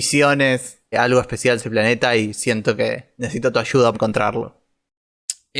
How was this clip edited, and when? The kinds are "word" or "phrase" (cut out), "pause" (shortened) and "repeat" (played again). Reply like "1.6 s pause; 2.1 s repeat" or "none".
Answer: 0.9 s word; 1.6 s word; 3.9 s word